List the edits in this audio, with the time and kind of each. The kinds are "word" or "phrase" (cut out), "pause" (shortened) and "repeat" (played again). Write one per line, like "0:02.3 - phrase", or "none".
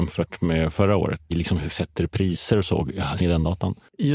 0:01.3 - word
0:01.7 - word
0:03.2 - word

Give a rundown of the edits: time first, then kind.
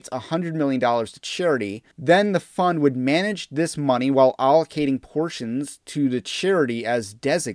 0:01.9 - pause

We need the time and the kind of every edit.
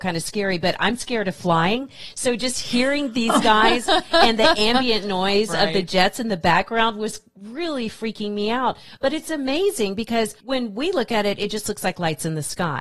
none

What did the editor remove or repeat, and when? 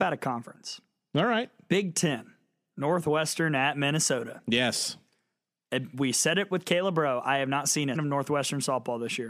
0:07.9 - word

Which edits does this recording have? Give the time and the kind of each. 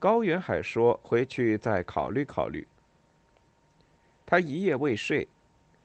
none

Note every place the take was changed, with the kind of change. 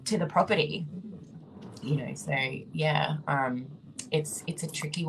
none

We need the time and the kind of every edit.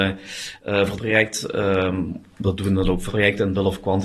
0:01.0 - word
0:03.1 - word

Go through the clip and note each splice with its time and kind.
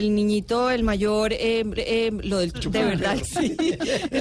0:01.8 - repeat
0:02.5 - phrase
0:03.2 - word

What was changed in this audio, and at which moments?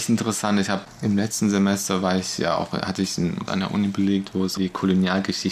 0:03.5 - word
0:04.6 - word

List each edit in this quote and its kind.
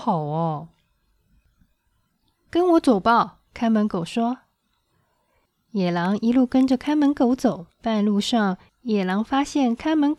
0:03.4 - pause
0:07.7 - pause

